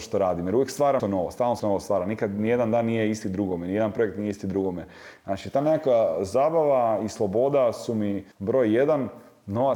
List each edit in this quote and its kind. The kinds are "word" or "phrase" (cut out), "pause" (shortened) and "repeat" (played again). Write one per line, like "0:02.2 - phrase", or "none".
0:01.0 - word
0:01.6 - word
0:08.3 - pause